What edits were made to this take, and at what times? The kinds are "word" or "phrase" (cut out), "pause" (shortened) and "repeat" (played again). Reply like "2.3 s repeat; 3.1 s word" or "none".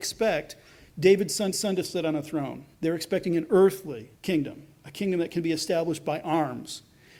1.5 s repeat; 2.7 s pause; 4.1 s pause

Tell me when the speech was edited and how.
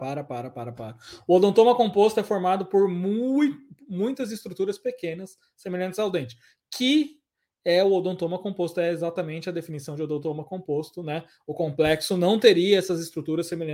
none

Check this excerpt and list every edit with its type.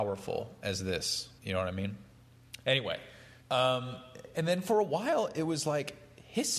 1.4 s pause; 3.4 s pause

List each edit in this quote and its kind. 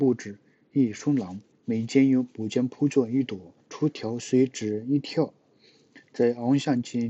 1.5 s pause; 3.6 s pause

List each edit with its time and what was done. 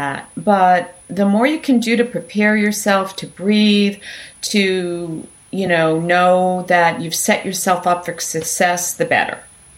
none

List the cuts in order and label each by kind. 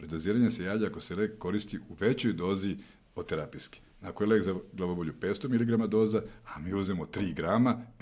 none

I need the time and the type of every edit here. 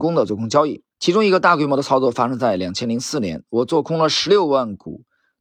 0.9 s pause

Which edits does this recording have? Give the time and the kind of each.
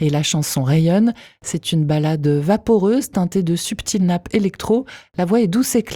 none

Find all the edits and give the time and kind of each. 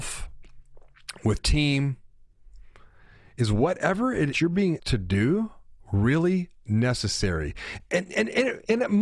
1.4 s word; 4.3 s phrase; 4.8 s word; 5.8 s pause

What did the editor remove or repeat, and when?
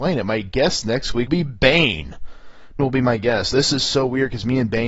1.3 s word; 2.8 s word; 3.5 s word

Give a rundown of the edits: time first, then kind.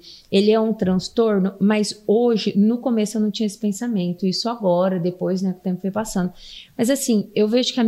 none

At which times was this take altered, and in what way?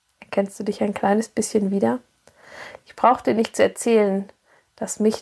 none

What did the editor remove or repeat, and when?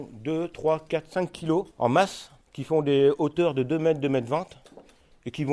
1.7 s pause; 2.4 s pause

